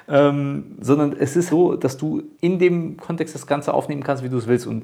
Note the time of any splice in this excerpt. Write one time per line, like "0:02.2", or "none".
0:01.5
0:02.3